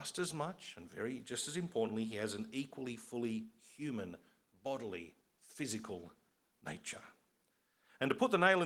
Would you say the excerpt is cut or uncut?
uncut